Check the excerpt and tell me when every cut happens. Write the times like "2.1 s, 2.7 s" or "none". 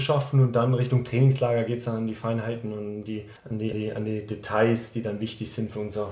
3.4 s, 3.7 s